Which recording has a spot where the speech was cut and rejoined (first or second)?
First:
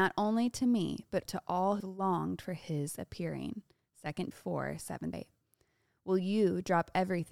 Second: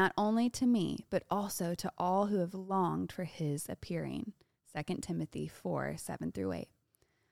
first